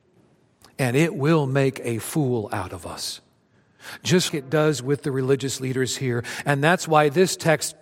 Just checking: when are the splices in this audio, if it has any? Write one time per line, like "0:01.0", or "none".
0:04.3